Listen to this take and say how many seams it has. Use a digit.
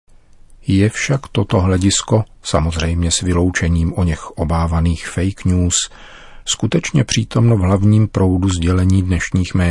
1